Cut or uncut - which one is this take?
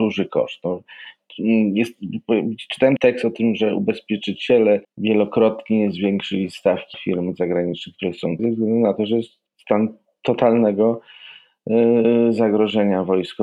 cut